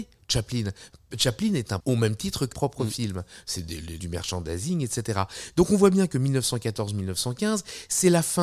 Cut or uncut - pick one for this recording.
cut